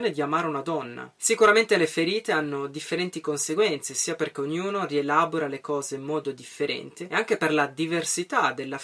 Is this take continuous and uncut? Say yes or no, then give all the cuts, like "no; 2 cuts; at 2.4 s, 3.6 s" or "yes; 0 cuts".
yes; 0 cuts